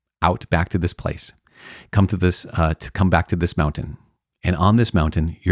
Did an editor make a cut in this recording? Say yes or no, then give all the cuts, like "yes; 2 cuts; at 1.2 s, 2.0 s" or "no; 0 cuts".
yes; 1 cut; at 4.2 s